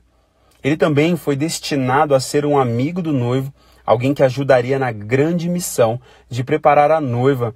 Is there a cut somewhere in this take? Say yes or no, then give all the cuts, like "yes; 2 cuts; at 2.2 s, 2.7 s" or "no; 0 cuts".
no; 0 cuts